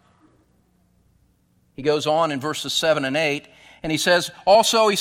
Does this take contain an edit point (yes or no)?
no